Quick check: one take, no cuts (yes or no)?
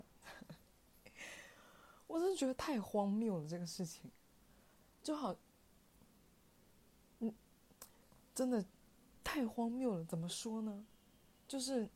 yes